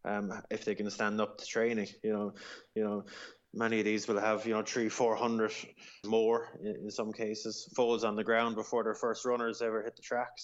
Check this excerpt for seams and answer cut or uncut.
cut